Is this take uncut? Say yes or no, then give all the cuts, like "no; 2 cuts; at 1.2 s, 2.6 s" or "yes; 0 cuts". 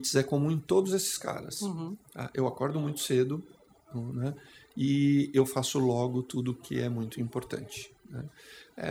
yes; 0 cuts